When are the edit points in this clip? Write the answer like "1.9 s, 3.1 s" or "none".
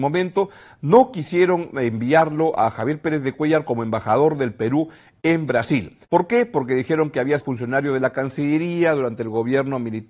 6.0 s, 7.4 s